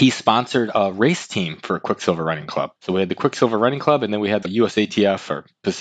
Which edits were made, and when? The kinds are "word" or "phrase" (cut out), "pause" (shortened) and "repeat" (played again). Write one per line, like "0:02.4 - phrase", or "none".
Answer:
0:02.8 - pause
0:04.4 - word